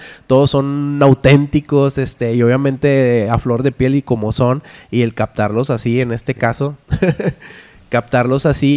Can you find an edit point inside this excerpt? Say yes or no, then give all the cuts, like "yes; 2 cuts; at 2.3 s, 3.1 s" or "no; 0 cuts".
no; 0 cuts